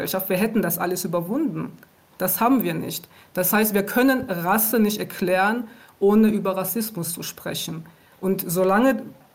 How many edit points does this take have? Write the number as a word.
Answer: zero